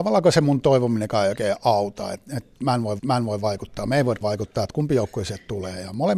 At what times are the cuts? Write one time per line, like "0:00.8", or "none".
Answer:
0:03.0
0:04.2

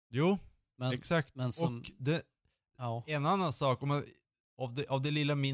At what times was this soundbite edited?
none

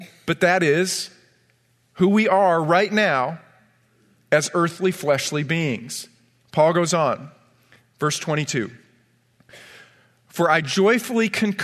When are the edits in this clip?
none

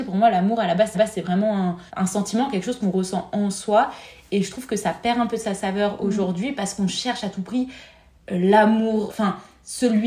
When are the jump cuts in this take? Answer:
0:00.9
0:01.9
0:09.1

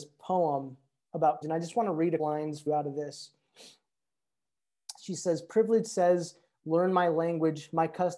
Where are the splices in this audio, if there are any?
0:01.4
0:02.2
0:02.7

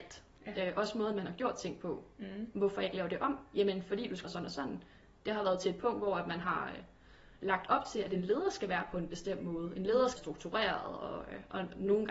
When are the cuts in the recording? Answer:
0:04.2
0:10.2

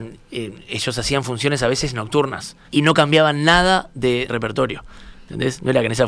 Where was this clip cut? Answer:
0:02.7
0:04.3

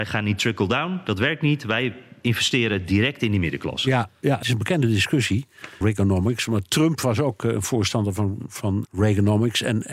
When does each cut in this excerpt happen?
0:04.4
0:05.8
0:08.8

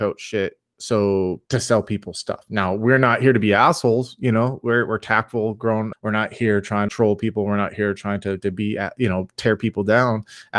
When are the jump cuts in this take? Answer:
0:01.5
0:05.9
0:06.9

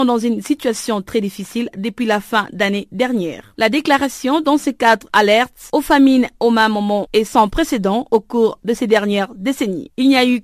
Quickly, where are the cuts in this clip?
none

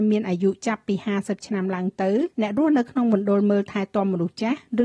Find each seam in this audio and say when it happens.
0:02.3

